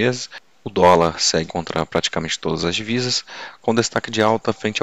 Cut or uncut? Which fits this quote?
cut